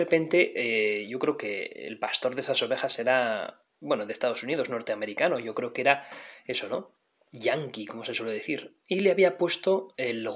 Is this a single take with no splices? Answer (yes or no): yes